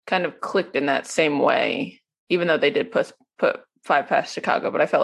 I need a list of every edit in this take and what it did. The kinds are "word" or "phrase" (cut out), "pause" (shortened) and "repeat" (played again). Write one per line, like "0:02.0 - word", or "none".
none